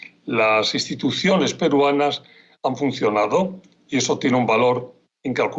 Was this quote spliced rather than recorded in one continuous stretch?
no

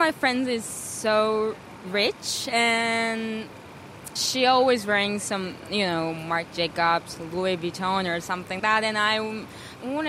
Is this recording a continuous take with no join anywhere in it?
no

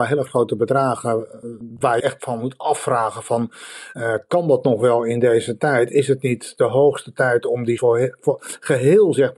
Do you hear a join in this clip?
yes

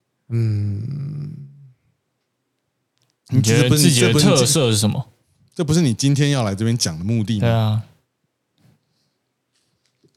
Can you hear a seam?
no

